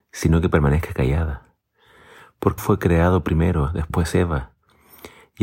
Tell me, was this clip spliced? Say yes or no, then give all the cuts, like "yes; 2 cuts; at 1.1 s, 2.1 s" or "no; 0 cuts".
yes; 1 cut; at 2.6 s